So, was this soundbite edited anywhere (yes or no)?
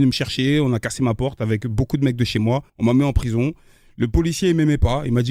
yes